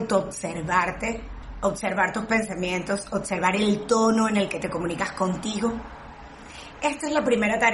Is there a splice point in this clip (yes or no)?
no